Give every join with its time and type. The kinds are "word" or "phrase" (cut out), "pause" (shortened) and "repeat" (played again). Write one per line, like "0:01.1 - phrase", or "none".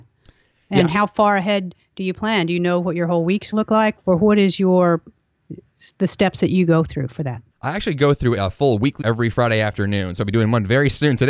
0:03.5 - phrase
0:04.0 - word
0:07.5 - pause
0:08.4 - word
0:09.0 - phrase
0:10.2 - word